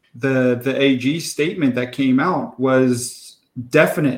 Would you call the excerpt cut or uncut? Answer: uncut